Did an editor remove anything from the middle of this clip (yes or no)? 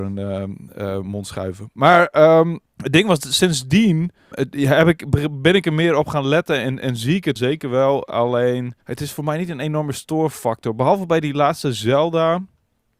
yes